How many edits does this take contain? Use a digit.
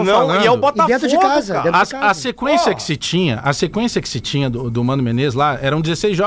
0